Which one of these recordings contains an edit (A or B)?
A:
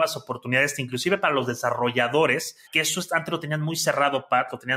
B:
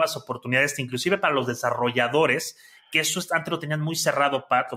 A